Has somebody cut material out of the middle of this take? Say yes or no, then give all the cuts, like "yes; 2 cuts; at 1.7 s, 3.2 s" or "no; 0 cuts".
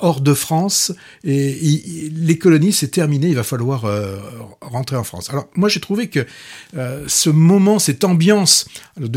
no; 0 cuts